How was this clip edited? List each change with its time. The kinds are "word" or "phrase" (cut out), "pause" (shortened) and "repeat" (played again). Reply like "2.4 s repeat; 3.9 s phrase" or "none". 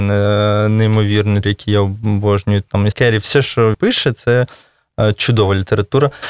1.4 s word; 2.9 s word; 3.7 s word